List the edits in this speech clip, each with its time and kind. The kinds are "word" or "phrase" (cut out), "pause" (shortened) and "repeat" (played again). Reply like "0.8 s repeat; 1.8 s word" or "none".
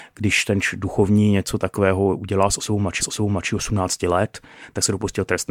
3.0 s repeat